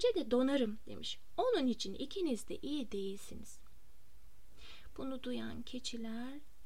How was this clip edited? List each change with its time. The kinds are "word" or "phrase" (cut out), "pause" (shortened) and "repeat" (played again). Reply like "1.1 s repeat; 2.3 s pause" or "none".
none